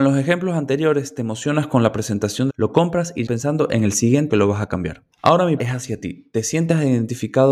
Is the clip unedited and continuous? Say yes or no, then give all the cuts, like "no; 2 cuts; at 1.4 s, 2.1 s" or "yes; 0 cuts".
no; 5 cuts; at 2.5 s, 3.3 s, 4.3 s, 5.1 s, 5.6 s